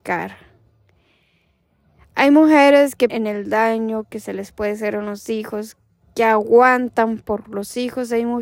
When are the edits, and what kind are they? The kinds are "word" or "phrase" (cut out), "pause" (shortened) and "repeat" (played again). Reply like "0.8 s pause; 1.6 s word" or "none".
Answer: 3.1 s word